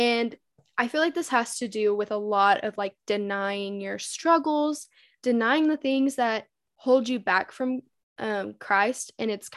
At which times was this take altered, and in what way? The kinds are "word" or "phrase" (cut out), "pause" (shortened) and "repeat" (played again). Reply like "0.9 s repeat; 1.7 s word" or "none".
none